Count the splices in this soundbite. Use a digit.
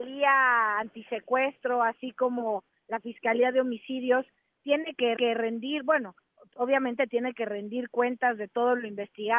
1